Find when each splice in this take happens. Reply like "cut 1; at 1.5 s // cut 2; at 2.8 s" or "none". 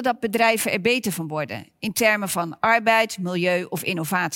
none